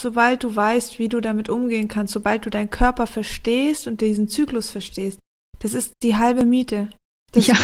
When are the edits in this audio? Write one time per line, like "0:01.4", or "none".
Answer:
none

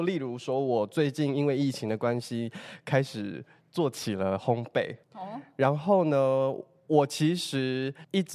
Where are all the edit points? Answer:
0:05.0

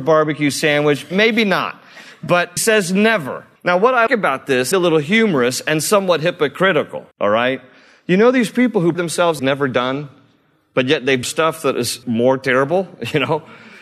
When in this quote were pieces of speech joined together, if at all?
0:02.6
0:03.6
0:04.1
0:04.7
0:07.1
0:08.9
0:09.4
0:11.2
0:12.0

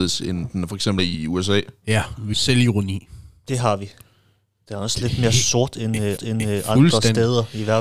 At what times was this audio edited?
0:01.0
0:02.3
0:06.2

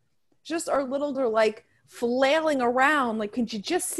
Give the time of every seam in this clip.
0:01.1

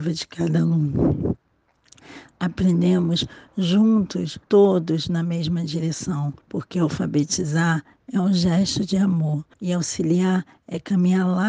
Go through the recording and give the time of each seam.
0:04.4
0:06.4
0:09.5

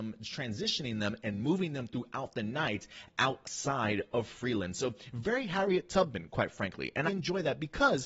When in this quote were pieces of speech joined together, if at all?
0:07.1

